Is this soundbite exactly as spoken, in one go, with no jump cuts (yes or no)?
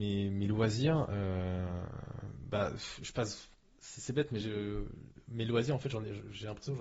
yes